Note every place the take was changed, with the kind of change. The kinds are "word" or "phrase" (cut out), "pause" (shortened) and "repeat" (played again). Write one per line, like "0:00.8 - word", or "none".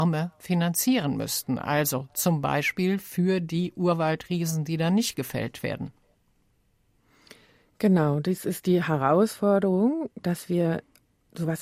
none